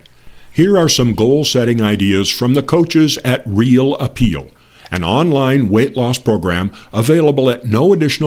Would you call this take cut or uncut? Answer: uncut